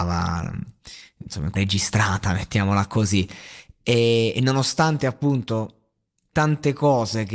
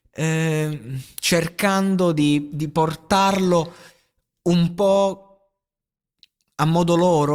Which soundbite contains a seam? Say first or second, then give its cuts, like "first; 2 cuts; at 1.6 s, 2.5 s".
first; 2 cuts; at 1.5 s, 6.3 s